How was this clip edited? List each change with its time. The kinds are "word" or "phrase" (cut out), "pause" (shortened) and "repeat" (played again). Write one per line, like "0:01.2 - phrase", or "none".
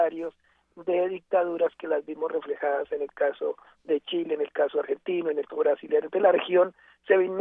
0:05.5 - word